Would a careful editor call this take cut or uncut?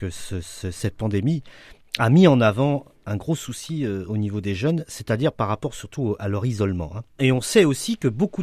uncut